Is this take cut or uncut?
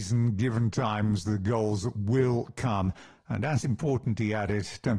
uncut